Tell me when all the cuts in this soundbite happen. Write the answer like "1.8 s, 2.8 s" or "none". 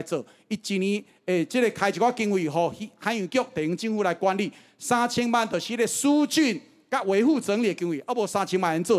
none

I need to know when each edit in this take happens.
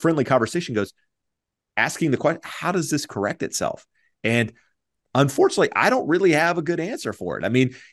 none

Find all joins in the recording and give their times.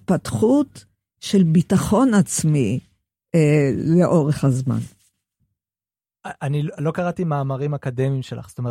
none

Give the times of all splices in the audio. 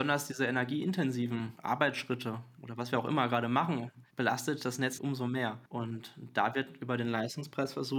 5.0 s, 5.7 s

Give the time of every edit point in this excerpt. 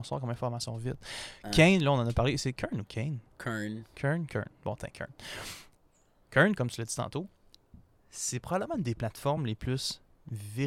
none

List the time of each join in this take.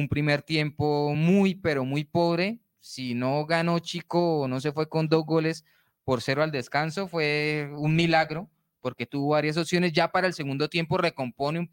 none

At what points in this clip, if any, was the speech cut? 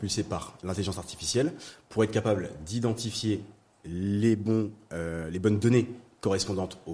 none

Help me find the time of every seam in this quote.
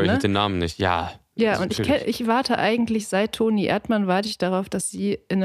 none

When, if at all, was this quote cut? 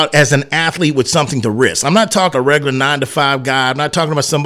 2.3 s

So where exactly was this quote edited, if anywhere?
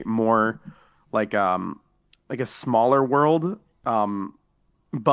none

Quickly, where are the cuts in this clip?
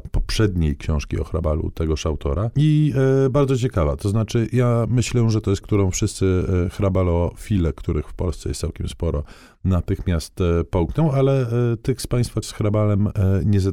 5.6 s, 12.4 s

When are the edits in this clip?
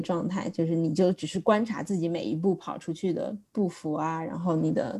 3.5 s

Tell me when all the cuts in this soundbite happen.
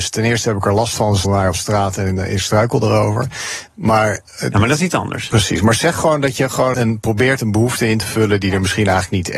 1.2 s, 6.7 s

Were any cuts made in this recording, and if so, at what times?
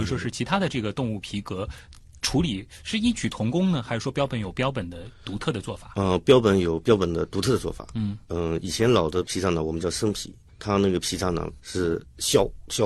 none

